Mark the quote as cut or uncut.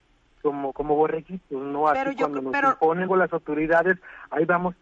cut